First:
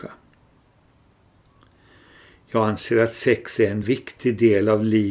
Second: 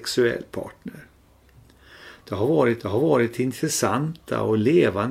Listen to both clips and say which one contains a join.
second; 1 cut; at 2.8 s

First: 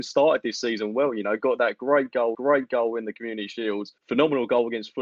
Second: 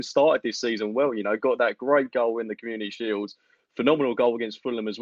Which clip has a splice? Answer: first; 2 cuts; at 2.3 s, 4.0 s

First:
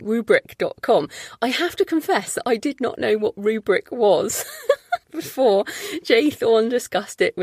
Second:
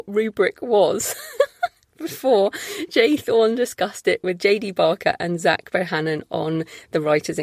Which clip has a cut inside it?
first; 1 cut; at 5.0 s

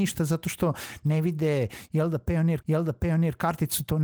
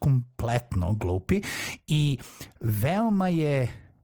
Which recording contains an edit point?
first; 1 cut; at 2.6 s

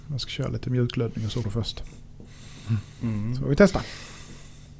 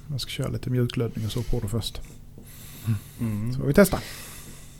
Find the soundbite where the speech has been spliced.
first; 1 cut; at 1.4 s

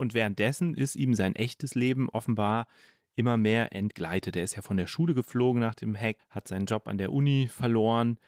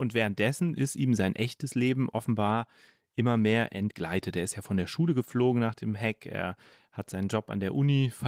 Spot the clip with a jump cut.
first; 1 cut; at 6.2 s

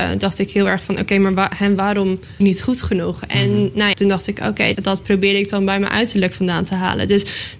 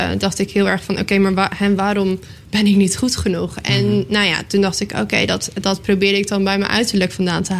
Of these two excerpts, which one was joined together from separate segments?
first; 3 cuts; at 2.4 s, 3.9 s, 4.7 s

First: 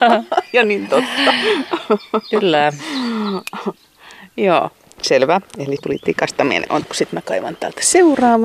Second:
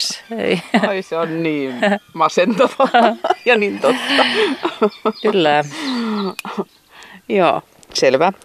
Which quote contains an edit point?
first; 2 cuts; at 5.8 s, 6.8 s

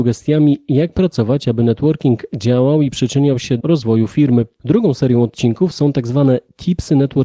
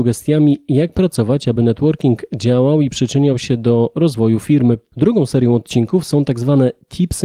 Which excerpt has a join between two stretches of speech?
first; 1 cut; at 3.6 s

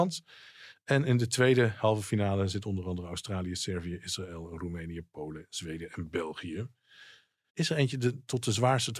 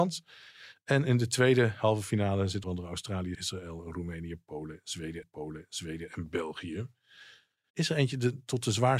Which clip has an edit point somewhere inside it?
second; 3 cuts; at 2.6 s, 3.3 s, 5.2 s

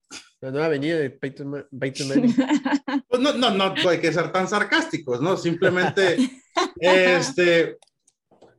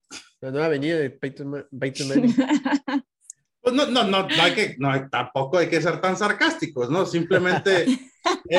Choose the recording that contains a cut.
first; 2 cuts; at 3.0 s, 3.8 s

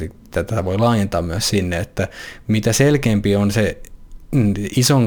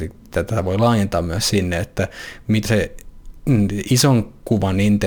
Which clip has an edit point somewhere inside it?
second; 1 cut; at 2.7 s

